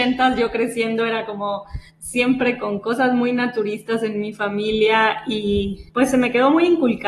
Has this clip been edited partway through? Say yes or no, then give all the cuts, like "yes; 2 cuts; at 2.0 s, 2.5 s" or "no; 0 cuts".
yes; 2 cuts; at 1.9 s, 5.9 s